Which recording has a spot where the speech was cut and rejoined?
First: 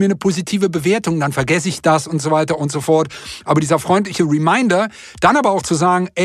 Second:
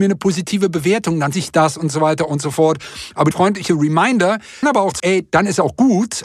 second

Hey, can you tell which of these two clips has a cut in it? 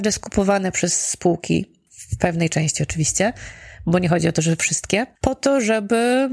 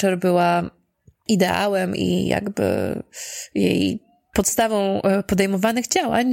first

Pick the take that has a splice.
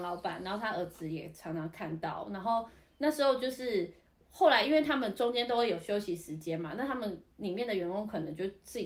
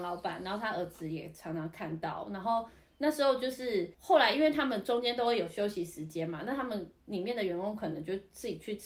second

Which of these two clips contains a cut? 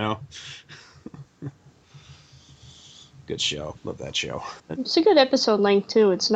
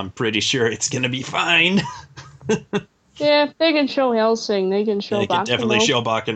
first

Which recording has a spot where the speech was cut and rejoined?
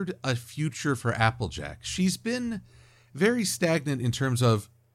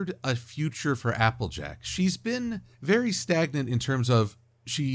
second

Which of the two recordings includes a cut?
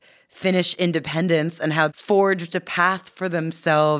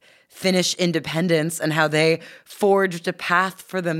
first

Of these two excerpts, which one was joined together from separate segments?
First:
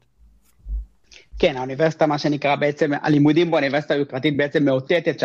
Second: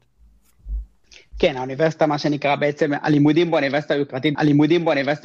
second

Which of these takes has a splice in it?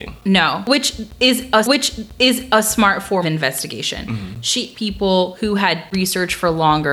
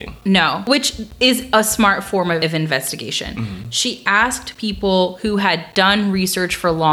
first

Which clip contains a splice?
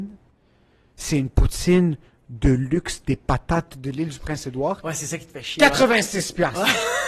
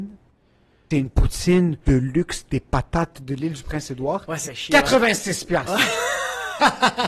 second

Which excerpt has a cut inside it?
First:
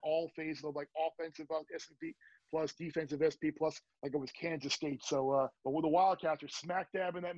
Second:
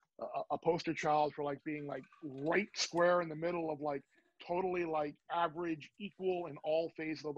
first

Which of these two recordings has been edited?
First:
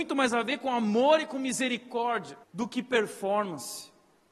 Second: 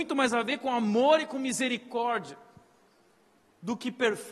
first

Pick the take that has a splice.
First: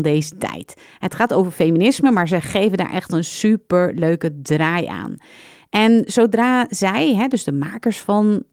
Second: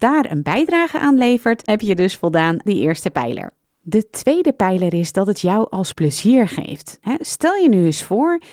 second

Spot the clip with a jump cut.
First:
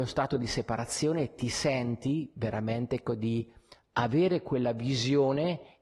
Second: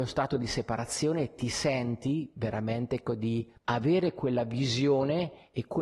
second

